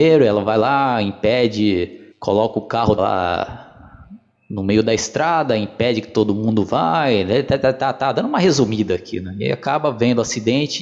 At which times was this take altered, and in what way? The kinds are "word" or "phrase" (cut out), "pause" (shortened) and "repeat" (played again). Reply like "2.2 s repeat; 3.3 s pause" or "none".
2.1 s pause; 3.0 s word